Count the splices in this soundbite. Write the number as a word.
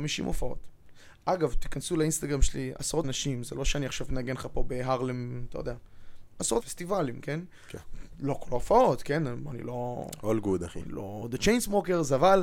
two